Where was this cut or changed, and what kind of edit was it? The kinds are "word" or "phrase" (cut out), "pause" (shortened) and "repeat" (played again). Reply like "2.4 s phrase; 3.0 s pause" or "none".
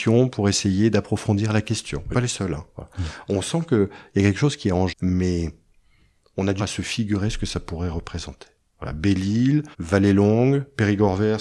2.1 s phrase; 4.9 s word; 6.6 s phrase; 9.7 s pause